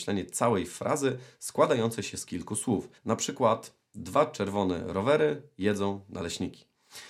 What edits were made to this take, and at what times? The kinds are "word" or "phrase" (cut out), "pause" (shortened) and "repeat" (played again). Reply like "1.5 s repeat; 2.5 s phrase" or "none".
3.0 s pause